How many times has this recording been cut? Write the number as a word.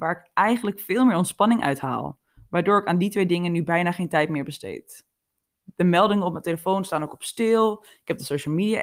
zero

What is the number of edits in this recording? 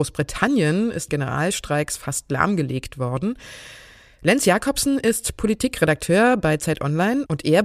one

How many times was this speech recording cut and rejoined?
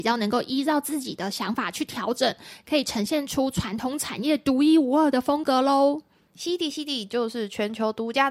zero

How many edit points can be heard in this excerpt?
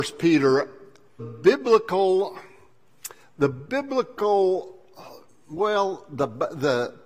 two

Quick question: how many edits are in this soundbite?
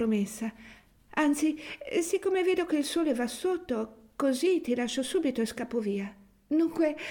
zero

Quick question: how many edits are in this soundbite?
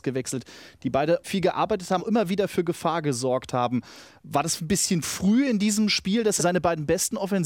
five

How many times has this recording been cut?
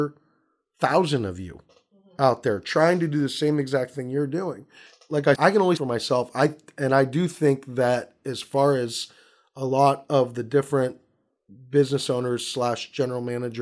two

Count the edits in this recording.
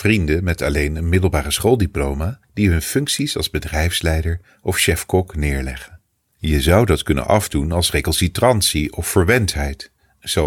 two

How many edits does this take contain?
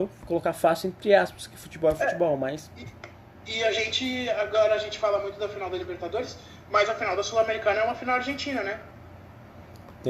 zero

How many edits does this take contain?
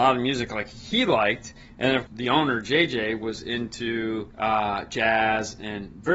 two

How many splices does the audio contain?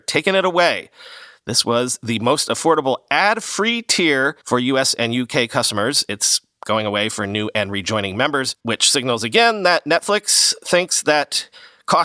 two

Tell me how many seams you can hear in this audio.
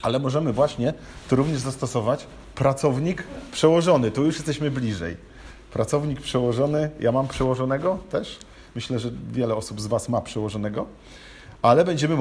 zero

